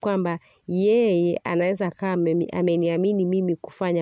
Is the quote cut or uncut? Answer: uncut